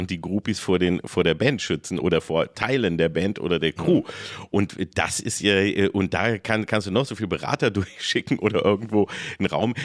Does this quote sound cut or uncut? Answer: uncut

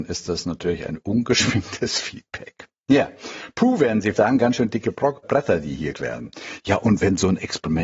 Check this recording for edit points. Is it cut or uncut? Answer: cut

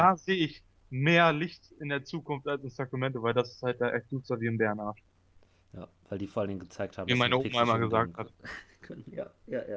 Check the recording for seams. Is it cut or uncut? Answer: uncut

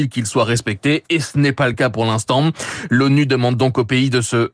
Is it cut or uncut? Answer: uncut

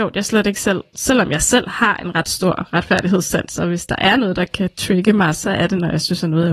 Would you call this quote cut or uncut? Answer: uncut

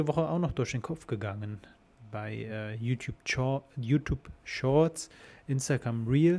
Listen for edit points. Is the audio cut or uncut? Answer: uncut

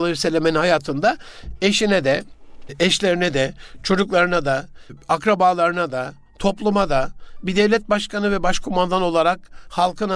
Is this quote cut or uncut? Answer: uncut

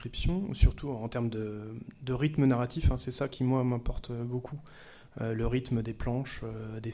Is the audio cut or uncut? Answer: uncut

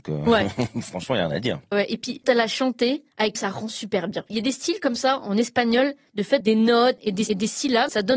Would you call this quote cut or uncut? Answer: cut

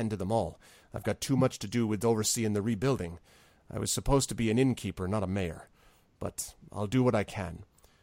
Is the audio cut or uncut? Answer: uncut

